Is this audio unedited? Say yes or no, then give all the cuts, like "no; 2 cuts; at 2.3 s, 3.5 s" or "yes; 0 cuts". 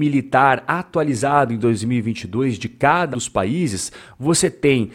no; 1 cut; at 3.1 s